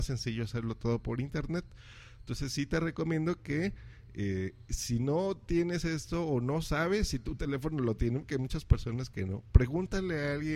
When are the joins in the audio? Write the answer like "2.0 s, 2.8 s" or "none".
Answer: none

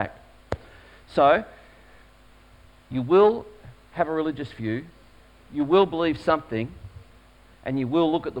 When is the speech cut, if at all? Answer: none

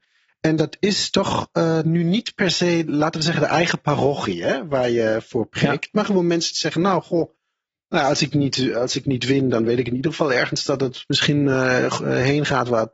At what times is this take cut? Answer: none

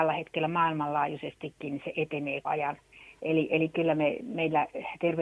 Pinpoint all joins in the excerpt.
2.4 s

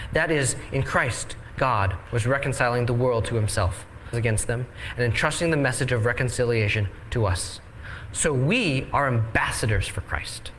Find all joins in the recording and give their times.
4.1 s

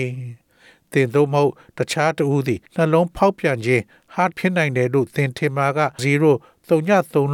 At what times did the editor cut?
2.7 s, 4.3 s, 6.0 s

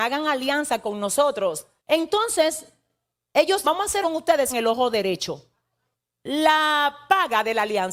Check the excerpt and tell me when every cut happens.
1.8 s, 3.6 s, 4.0 s, 4.5 s, 5.9 s

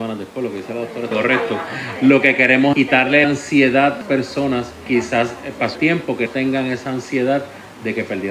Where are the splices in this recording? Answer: 1.1 s, 2.7 s, 3.2 s, 4.0 s, 4.9 s, 5.8 s, 6.3 s

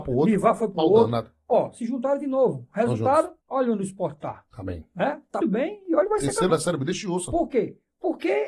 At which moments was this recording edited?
3.4 s, 5.4 s, 6.5 s

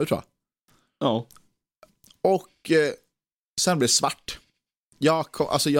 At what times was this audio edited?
none

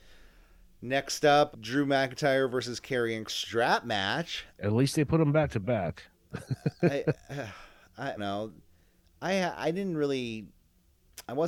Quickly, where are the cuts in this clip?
1.5 s, 3.3 s, 4.5 s, 6.1 s, 8.2 s

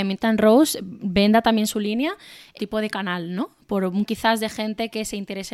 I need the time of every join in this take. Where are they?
2.6 s, 4.1 s

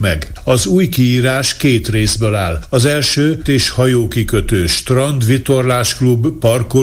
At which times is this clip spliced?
3.4 s

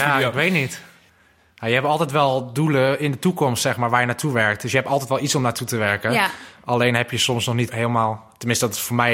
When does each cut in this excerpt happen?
7.7 s

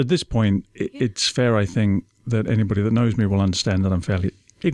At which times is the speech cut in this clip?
none

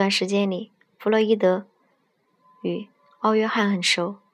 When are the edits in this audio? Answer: none

